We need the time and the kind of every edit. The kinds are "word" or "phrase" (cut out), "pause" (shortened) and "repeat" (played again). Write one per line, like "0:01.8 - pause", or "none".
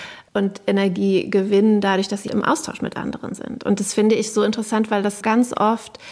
0:02.3 - word
0:05.2 - word